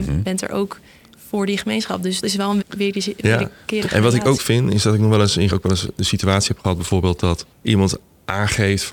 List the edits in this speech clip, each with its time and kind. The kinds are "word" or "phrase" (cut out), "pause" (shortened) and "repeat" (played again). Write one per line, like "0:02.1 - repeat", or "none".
0:02.2 - word
0:02.6 - word
0:04.4 - word
0:05.5 - phrase
0:07.5 - pause